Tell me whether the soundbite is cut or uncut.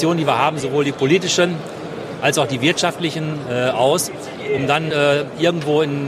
uncut